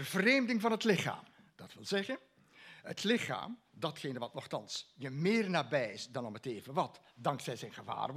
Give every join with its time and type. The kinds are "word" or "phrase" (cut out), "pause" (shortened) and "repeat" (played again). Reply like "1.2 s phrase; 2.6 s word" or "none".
1.3 s pause